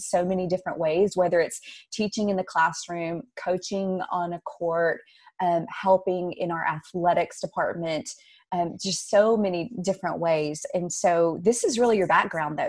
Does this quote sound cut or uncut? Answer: uncut